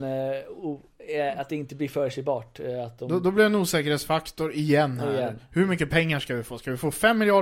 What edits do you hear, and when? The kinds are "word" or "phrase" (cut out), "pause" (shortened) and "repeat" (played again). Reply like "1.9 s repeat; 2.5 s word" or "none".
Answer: none